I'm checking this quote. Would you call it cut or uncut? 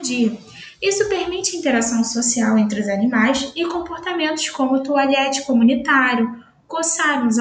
uncut